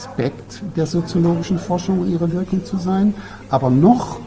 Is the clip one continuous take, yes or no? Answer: yes